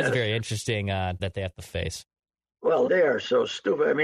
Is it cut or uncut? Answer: cut